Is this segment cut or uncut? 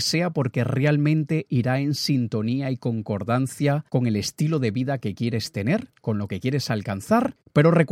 uncut